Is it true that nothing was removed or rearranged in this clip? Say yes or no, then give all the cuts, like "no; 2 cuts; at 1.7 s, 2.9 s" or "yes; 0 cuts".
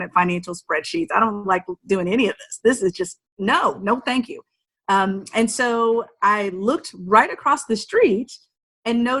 yes; 0 cuts